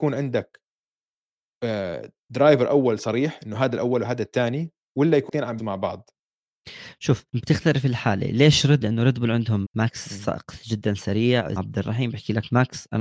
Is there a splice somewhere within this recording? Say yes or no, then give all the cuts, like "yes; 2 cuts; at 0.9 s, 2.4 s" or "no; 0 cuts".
yes; 6 cuts; at 5.3 s, 5.6 s, 7.3 s, 8.8 s, 9.6 s, 11.6 s